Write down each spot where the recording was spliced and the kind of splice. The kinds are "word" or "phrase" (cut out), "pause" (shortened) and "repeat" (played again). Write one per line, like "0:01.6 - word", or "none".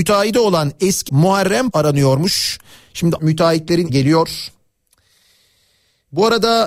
0:01.1 - word
0:01.7 - word
0:03.2 - word
0:03.9 - word